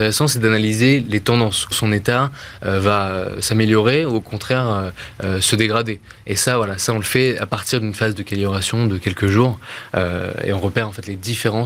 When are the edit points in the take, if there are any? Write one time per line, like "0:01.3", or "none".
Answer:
0:01.7